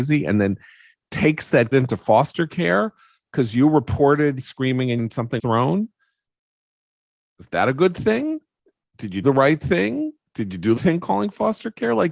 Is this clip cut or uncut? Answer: cut